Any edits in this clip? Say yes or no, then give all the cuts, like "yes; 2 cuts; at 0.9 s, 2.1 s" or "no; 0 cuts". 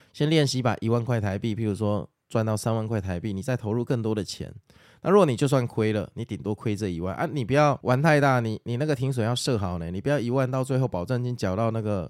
no; 0 cuts